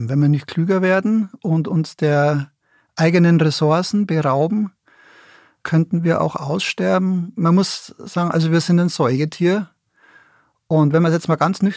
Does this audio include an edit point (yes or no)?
no